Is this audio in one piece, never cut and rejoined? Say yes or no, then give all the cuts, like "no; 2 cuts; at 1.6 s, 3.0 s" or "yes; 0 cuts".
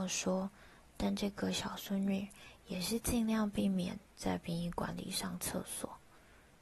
no; 1 cut; at 4.1 s